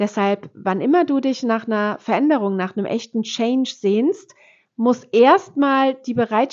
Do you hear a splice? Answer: no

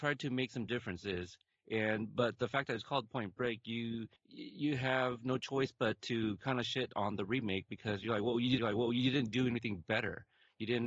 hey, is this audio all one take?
no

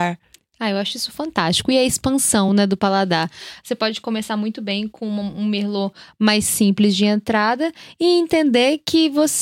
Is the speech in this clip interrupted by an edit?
no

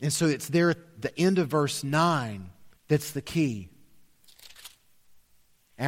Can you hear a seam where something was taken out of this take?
yes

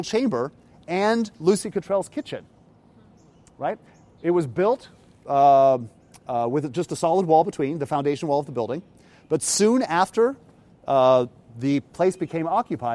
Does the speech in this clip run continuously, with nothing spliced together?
yes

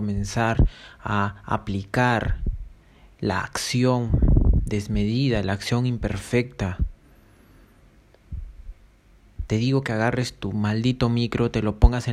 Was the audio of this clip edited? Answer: no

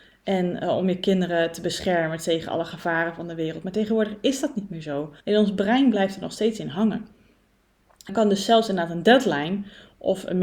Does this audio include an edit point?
yes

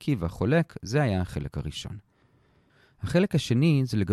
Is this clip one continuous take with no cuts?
yes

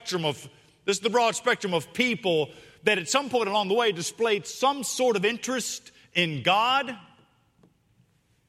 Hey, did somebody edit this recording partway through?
no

